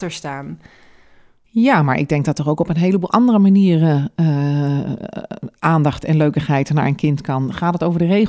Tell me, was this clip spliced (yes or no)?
no